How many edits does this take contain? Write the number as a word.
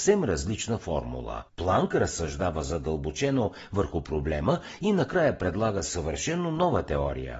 one